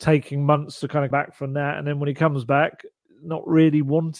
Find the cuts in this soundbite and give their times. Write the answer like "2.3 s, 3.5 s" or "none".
1.1 s